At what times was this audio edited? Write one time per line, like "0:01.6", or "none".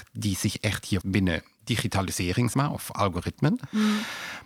0:01.0
0:02.5